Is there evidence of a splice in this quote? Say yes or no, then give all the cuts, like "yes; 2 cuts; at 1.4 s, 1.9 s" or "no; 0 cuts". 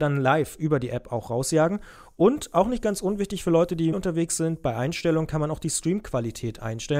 yes; 1 cut; at 3.9 s